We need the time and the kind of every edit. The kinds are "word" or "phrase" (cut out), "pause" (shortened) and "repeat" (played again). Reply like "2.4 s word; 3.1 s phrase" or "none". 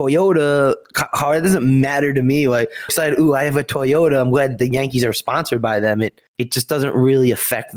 2.9 s phrase; 6.3 s pause